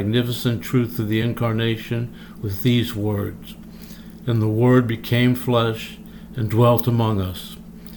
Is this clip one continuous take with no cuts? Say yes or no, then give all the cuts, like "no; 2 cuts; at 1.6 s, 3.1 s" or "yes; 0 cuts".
yes; 0 cuts